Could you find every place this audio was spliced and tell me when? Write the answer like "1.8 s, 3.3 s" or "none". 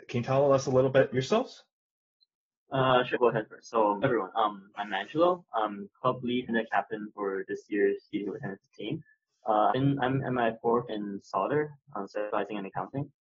1.1 s, 3.1 s, 4.0 s, 6.5 s, 8.1 s, 9.7 s, 10.9 s